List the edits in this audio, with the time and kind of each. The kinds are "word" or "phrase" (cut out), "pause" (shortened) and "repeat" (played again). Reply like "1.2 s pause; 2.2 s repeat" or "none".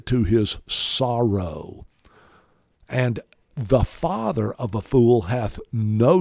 none